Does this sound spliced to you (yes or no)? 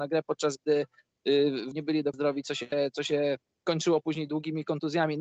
yes